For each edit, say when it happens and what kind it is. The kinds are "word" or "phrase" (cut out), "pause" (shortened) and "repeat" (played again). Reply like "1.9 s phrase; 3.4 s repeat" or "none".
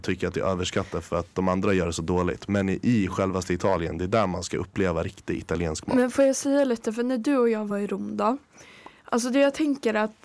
none